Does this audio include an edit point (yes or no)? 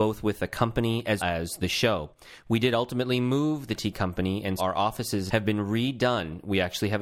yes